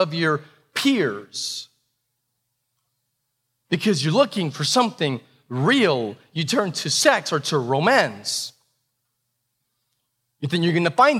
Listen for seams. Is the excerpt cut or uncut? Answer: uncut